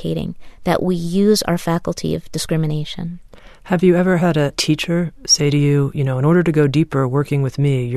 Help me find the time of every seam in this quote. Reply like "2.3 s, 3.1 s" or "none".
none